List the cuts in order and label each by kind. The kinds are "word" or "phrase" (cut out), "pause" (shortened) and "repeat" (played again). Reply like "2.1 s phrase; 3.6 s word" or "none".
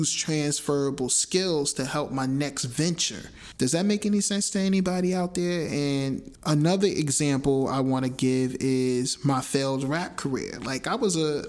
none